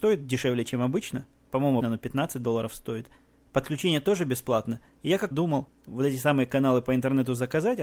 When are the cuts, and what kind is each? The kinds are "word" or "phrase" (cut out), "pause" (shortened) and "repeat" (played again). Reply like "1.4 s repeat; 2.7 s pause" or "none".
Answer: 1.8 s word; 5.3 s phrase